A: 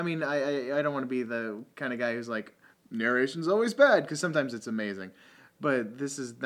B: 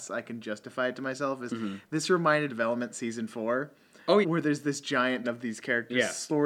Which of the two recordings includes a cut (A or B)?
B